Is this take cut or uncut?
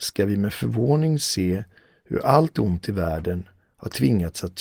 uncut